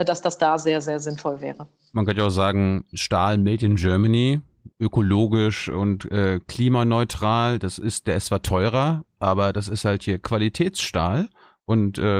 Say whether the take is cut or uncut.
uncut